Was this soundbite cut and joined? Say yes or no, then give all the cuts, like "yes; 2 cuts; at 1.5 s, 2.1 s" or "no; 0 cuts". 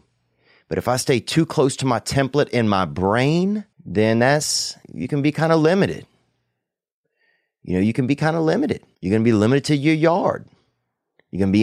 yes; 3 cuts; at 3.7 s, 4.8 s, 8.9 s